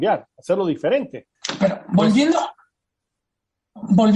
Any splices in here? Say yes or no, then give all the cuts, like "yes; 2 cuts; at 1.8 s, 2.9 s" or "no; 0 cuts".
yes; 1 cut; at 1.3 s